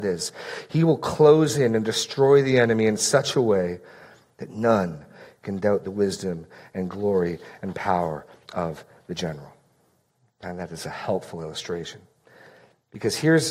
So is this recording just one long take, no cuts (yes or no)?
yes